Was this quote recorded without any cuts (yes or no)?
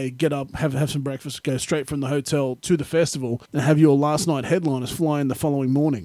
no